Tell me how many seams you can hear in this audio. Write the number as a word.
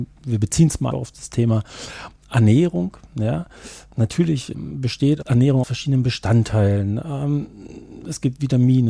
three